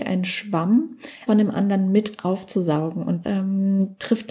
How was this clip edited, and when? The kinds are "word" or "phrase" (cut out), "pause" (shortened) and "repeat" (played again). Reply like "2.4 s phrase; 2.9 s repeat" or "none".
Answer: 1.3 s word; 3.2 s word